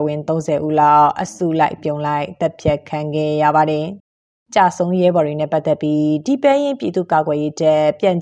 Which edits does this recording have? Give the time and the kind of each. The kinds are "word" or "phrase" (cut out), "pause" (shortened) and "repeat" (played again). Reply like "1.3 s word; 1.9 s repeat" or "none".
4.0 s pause